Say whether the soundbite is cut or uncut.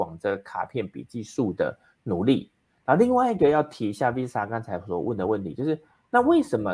uncut